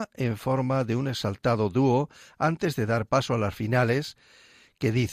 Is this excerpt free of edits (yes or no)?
no